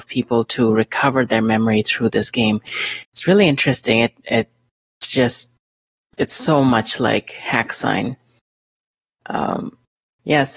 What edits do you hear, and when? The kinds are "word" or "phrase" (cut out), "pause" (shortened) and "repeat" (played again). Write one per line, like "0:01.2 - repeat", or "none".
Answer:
none